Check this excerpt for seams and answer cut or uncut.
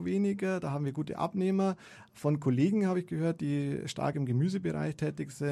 uncut